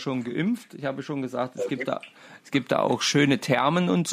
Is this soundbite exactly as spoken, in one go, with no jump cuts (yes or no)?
yes